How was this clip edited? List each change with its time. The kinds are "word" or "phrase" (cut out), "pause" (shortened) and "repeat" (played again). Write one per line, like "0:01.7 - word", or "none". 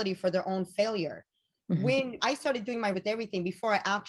0:02.2 - word
0:02.9 - word